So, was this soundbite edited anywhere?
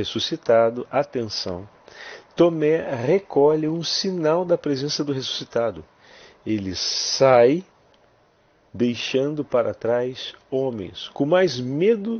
no; 0 cuts

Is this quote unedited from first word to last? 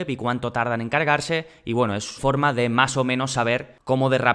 no; 1 cut; at 2.2 s

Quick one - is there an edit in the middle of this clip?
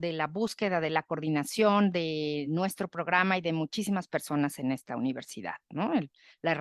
no; 0 cuts

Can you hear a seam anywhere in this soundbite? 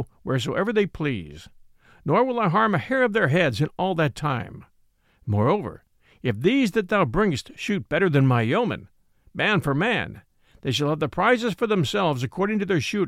no; 0 cuts

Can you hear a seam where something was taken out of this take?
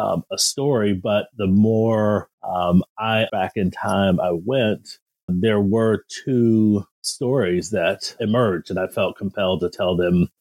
yes; 5 cuts; at 2.3 s, 3.3 s, 5.3 s, 6.9 s, 8.2 s

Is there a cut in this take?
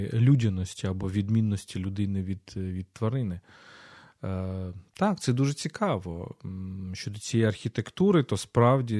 no; 0 cuts

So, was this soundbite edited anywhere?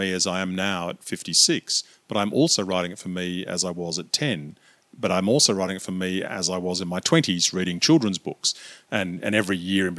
no; 0 cuts

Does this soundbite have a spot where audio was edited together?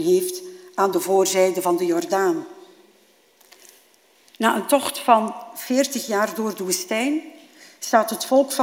no; 0 cuts

